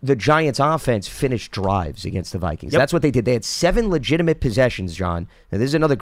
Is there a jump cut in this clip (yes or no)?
no